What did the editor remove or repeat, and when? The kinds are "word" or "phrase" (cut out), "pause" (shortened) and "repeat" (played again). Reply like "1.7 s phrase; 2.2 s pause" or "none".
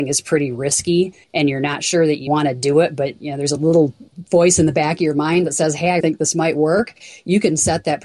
1.2 s pause; 2.3 s word; 4.1 s pause; 6.0 s word